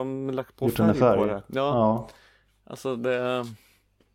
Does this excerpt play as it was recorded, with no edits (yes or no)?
yes